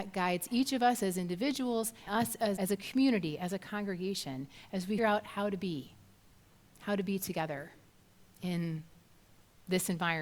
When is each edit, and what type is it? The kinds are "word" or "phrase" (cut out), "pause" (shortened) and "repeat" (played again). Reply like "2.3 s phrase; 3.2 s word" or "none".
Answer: 2.1 s word; 2.6 s word; 5.0 s word